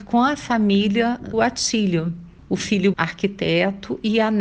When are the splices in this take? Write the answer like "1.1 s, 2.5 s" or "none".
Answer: 1.3 s, 2.9 s